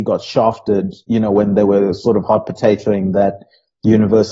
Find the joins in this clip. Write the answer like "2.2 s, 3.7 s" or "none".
1.0 s